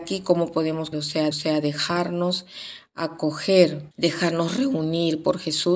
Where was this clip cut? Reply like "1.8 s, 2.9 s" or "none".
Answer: 0.9 s, 1.3 s, 3.9 s